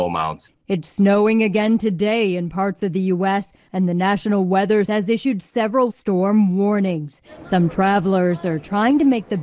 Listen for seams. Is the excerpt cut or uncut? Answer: cut